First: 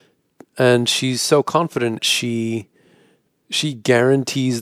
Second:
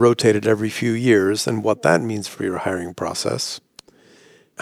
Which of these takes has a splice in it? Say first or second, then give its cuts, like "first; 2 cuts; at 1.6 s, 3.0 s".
first; 1 cut; at 2.0 s